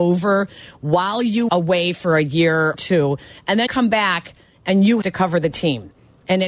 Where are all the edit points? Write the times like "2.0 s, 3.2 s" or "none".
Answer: 1.5 s, 2.7 s, 3.7 s, 5.0 s